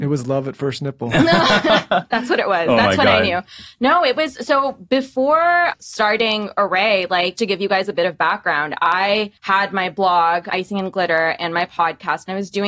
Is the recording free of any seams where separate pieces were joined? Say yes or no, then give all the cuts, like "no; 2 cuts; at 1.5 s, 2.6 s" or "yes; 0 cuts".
no; 2 cuts; at 7.4 s, 9.4 s